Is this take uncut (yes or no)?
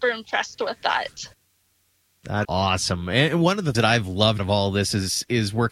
no